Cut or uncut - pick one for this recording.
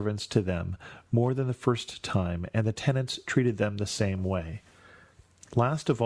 uncut